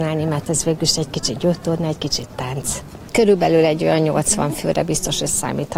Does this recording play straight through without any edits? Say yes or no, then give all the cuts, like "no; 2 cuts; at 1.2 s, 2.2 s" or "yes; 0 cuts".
yes; 0 cuts